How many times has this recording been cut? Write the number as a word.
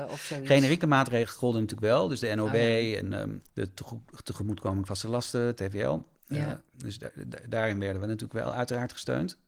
one